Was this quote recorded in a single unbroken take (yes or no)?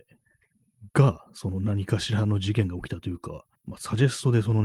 no